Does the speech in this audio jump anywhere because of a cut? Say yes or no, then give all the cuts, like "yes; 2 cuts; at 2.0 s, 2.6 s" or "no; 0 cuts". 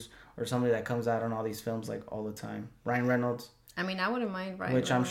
no; 0 cuts